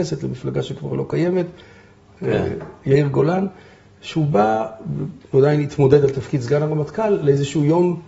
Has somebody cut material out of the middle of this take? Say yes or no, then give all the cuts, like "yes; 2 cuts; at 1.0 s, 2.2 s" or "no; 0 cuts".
yes; 1 cut; at 5.3 s